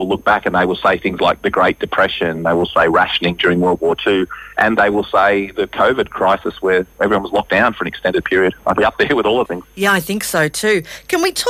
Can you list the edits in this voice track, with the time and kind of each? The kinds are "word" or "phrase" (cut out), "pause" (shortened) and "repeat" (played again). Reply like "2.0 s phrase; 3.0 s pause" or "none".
8.8 s word; 9.4 s word

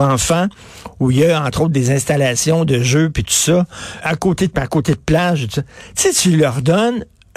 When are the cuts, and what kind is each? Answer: 4.0 s word; 4.5 s word

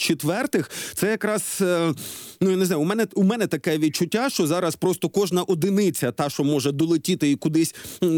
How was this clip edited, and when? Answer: none

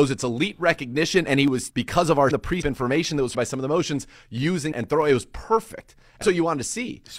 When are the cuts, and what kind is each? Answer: 1.7 s word; 2.3 s word; 2.6 s word; 3.3 s word; 4.7 s word; 6.2 s word

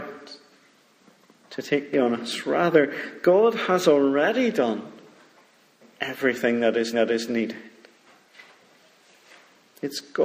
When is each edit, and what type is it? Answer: 1.9 s word; 6.9 s repeat

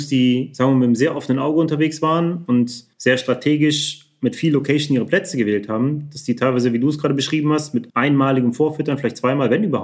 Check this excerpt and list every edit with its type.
2.9 s pause; 7.9 s pause

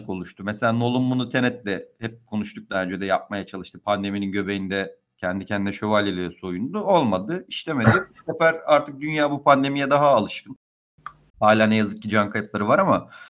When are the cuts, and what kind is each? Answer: none

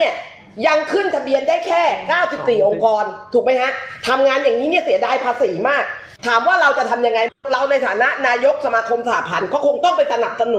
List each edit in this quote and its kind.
6.2 s pause

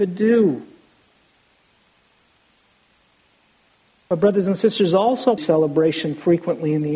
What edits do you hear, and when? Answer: 5.4 s phrase

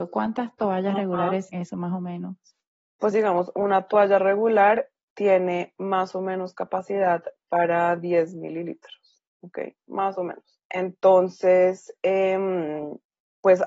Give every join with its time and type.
1.5 s word; 3.1 s word; 9.3 s pause; 10.6 s pause

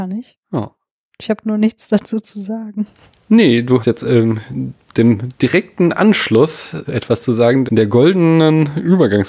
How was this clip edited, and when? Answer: 3.8 s word; 6.8 s word; 7.7 s word

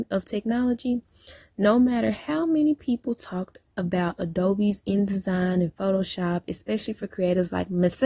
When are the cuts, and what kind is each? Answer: none

